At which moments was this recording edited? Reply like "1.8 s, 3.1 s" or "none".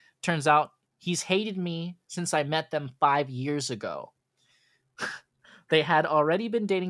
none

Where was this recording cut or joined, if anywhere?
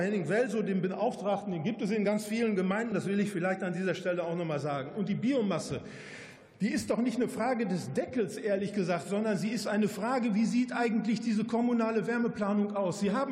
2.9 s

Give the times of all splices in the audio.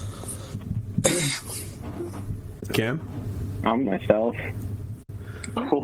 2.7 s, 3.8 s

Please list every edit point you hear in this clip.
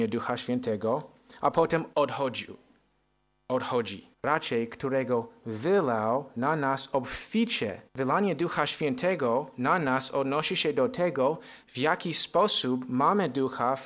1.9 s, 4.1 s, 7.9 s

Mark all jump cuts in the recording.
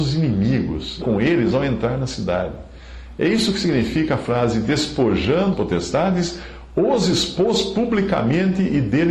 1.0 s, 5.5 s

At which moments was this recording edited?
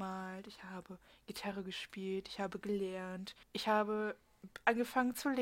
3.4 s

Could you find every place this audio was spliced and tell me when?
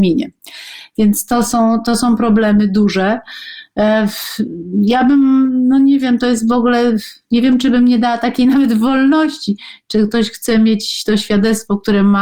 none

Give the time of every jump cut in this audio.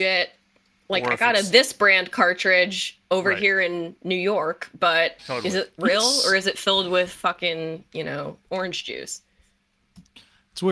3.1 s

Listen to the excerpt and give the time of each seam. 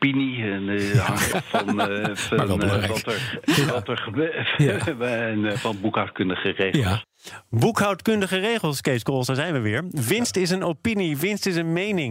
1.3 s

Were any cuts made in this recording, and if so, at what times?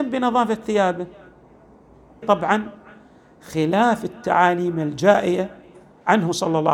2.2 s

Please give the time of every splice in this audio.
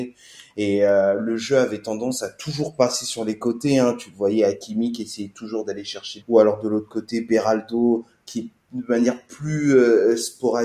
6.2 s

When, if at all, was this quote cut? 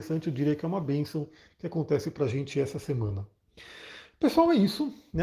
none

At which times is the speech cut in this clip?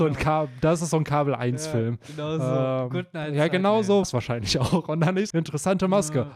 4.0 s, 5.3 s

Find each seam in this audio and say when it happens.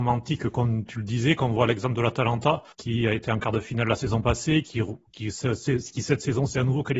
2.7 s

